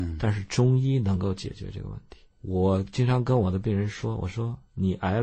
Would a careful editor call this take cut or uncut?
cut